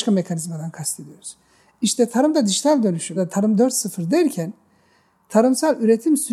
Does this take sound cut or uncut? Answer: cut